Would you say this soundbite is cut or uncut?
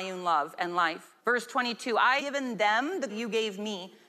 cut